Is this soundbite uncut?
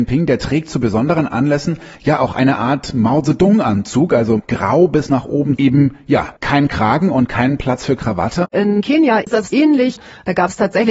no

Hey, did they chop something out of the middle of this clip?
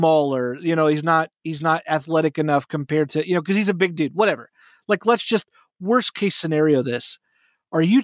no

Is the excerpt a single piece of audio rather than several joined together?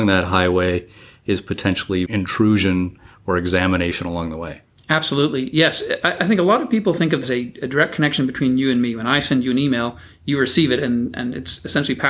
no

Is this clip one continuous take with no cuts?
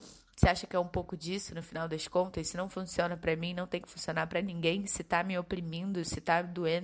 yes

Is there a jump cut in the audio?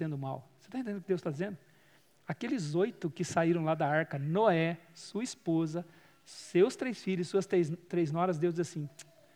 no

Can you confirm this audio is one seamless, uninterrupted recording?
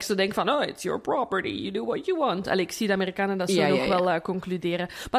yes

